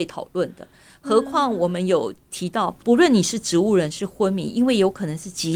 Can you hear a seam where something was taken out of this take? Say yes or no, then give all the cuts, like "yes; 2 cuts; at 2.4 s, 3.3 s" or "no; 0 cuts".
yes; 1 cut; at 2.8 s